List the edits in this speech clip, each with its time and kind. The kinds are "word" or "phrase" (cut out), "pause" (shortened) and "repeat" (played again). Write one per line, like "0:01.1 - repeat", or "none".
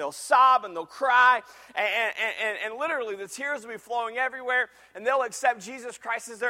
none